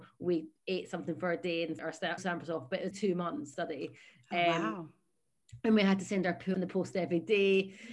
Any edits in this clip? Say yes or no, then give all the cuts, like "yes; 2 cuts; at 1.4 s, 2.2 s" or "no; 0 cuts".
yes; 5 cuts; at 1.8 s, 2.2 s, 2.9 s, 3.5 s, 6.5 s